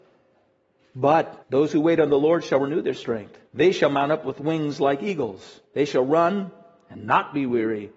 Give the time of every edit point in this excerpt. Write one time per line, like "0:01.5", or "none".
0:01.4
0:03.5
0:05.6

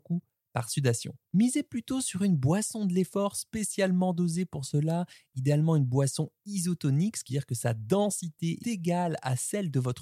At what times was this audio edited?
0:07.3
0:08.6

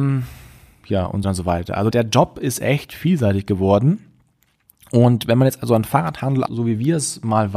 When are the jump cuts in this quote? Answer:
0:01.2
0:01.9
0:06.5

